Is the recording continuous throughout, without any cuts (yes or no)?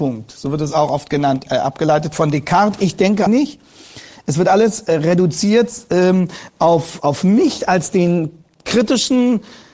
no